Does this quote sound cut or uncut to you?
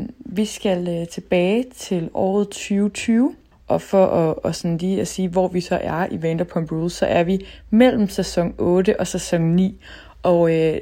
uncut